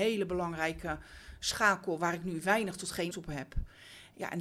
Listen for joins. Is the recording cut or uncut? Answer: cut